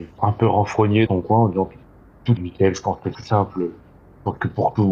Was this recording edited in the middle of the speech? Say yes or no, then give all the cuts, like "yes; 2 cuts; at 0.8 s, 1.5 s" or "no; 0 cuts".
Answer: yes; 3 cuts; at 1.1 s, 2.4 s, 3.1 s